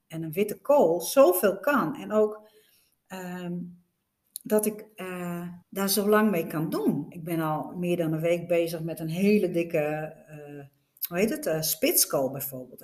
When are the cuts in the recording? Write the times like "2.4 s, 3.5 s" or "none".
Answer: 5.6 s